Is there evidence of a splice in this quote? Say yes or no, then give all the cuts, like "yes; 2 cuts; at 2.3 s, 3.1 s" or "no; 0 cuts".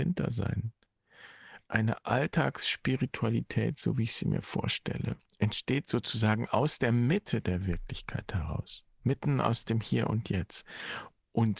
yes; 3 cuts; at 1.6 s, 5.2 s, 8.9 s